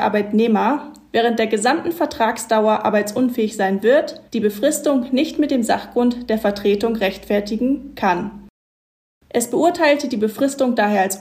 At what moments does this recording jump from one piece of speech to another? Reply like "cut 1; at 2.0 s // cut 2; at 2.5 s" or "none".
cut 1; at 4.3 s

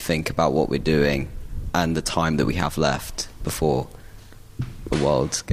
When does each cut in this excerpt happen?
none

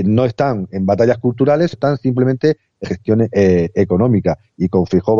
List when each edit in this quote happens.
cut 1; at 1.7 s // cut 2; at 2.8 s

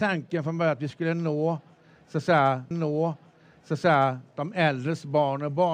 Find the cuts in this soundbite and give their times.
cut 1; at 2.7 s

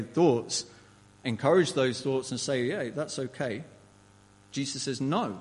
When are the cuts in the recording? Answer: none

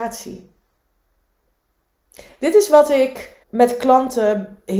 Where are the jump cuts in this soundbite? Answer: cut 1; at 3.4 s

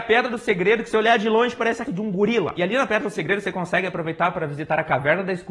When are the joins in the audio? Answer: cut 1; at 0.9 s // cut 2; at 1.9 s

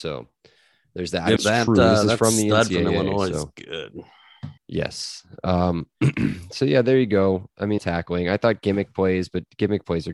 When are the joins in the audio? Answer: cut 1; at 1.4 s // cut 2; at 4.6 s // cut 3; at 7.8 s

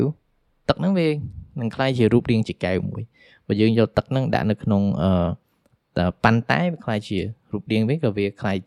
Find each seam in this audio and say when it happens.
none

